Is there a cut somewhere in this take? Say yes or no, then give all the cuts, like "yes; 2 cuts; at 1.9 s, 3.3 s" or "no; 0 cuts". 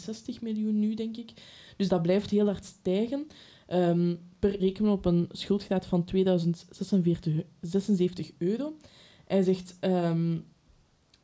yes; 2 cuts; at 1.9 s, 4.6 s